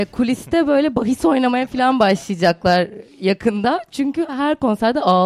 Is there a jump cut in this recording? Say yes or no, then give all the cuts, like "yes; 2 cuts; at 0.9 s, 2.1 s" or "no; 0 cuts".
no; 0 cuts